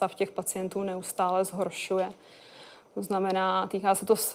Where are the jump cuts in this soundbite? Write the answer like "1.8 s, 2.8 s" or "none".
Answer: none